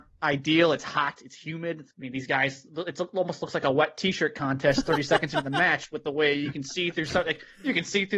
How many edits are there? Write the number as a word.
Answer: one